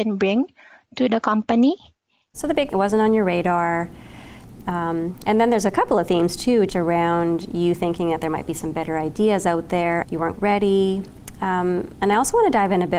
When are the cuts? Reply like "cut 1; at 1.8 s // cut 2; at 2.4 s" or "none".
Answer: cut 1; at 2.7 s // cut 2; at 6.7 s // cut 3; at 10.3 s